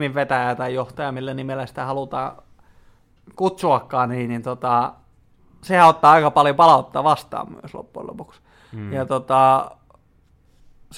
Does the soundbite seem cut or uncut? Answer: uncut